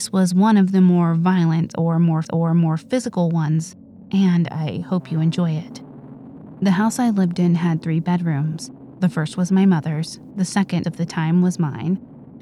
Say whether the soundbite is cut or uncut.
cut